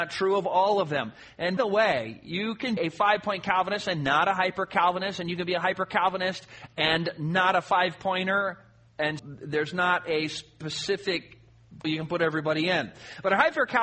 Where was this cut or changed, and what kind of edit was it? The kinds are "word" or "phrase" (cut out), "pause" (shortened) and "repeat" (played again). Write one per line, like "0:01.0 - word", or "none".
0:01.6 - word
0:02.8 - word
0:09.2 - word
0:11.8 - word